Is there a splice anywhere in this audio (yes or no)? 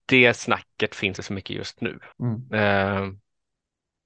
yes